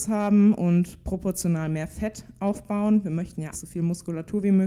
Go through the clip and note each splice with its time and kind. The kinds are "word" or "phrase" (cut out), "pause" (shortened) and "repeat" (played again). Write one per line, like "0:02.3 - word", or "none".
0:03.5 - word